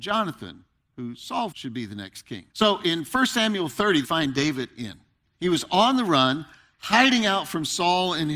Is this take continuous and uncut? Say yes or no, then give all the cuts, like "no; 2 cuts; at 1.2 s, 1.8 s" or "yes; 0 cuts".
no; 4 cuts; at 1.5 s, 2.5 s, 4.0 s, 5.2 s